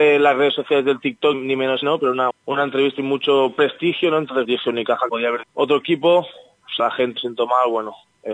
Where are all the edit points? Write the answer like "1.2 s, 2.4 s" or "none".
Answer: 1.3 s, 1.8 s, 2.3 s, 3.0 s, 4.4 s, 5.1 s, 5.4 s, 6.8 s, 7.2 s